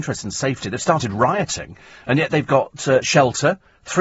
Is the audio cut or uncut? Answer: uncut